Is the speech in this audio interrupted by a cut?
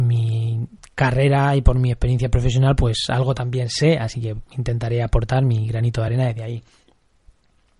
no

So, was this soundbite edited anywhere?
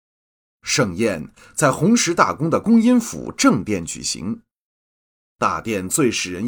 no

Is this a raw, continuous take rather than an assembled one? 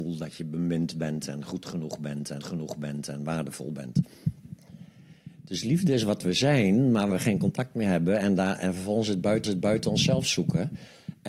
no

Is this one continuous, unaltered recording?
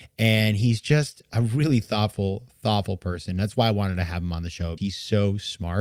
no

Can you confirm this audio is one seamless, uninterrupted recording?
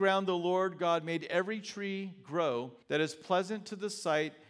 no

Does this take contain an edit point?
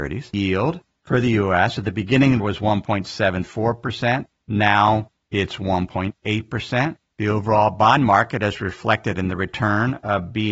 yes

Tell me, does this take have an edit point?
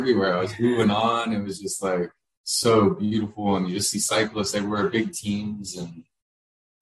no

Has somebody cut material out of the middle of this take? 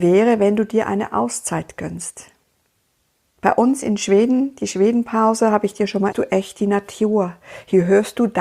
yes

